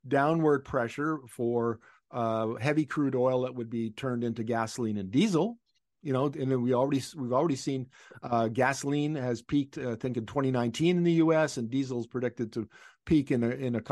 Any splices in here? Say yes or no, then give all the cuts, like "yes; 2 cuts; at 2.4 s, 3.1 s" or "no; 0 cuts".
no; 0 cuts